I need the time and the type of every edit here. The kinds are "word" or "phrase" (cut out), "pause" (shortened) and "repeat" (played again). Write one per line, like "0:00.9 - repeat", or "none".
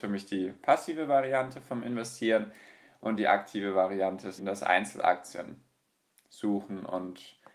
0:04.4 - word